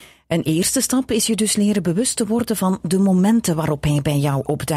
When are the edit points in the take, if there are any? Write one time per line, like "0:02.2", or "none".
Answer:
none